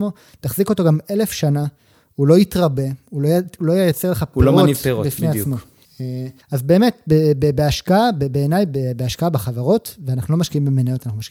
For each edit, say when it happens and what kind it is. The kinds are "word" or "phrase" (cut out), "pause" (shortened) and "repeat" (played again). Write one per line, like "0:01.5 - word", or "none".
0:06.4 - pause